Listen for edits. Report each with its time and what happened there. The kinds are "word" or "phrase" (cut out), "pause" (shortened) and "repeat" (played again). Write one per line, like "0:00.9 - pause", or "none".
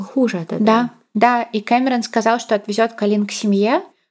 none